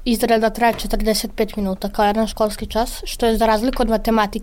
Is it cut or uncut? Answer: uncut